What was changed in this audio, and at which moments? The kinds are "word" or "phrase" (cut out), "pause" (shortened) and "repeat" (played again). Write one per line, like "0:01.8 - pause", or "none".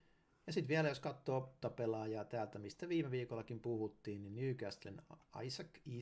0:01.6 - phrase